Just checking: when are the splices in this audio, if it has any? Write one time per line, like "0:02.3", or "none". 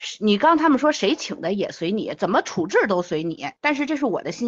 0:03.6